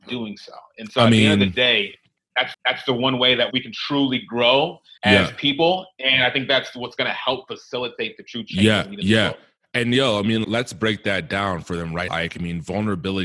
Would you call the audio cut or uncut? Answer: cut